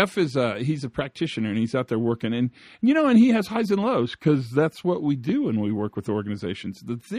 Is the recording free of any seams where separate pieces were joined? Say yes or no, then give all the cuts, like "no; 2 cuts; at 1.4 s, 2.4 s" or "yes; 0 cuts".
yes; 0 cuts